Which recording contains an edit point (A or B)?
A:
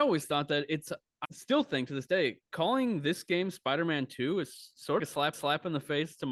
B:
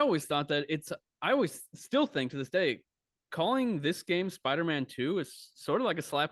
A